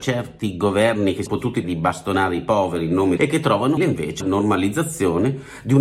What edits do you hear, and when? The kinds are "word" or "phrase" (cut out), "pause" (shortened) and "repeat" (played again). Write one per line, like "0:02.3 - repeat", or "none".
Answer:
0:01.3 - word
0:01.6 - word
0:03.2 - word
0:03.8 - word
0:04.2 - word